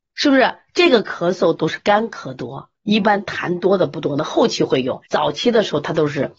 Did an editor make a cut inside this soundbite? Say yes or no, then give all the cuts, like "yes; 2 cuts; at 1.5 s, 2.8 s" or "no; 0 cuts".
yes; 2 cuts; at 2.7 s, 5.1 s